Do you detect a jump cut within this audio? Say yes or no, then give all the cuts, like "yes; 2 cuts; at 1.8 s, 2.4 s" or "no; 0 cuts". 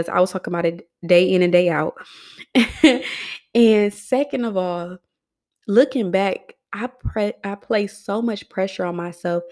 no; 0 cuts